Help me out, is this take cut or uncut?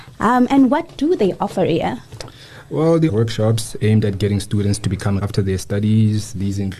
cut